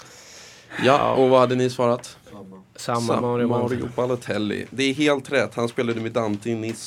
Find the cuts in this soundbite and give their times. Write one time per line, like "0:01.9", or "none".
none